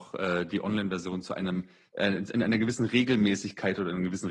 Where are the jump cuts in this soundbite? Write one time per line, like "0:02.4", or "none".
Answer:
0:01.9